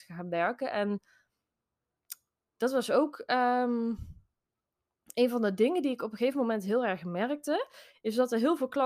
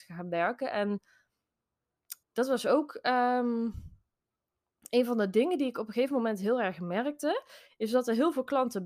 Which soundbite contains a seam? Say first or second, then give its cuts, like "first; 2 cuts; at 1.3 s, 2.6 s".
second; 1 cut; at 2.2 s